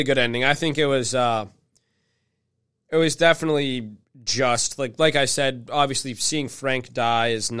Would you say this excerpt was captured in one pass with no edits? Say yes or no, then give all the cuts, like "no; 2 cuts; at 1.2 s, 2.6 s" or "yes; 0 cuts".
no; 1 cut; at 4.0 s